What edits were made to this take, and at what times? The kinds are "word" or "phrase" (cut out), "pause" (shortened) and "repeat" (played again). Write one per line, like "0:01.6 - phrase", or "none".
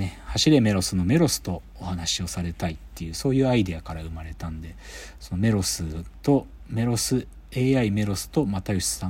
none